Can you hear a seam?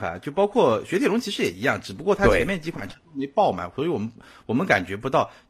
no; 0 cuts

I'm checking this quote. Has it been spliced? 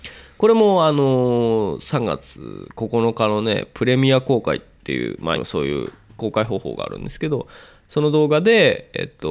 yes; 1 cut; at 5.3 s

